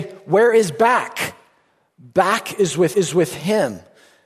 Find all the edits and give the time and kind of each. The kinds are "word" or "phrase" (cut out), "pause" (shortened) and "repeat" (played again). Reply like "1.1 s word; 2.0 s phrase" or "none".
2.9 s repeat